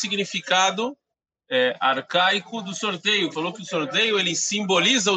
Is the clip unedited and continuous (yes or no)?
no